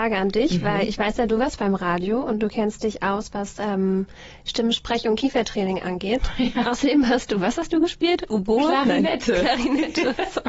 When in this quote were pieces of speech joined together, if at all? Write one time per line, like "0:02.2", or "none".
none